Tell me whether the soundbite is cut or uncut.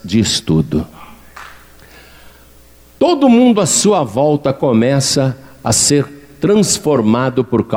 uncut